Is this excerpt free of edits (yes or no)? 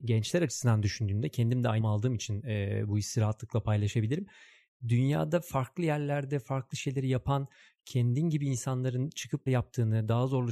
no